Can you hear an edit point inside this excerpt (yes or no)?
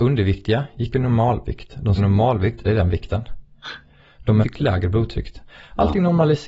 yes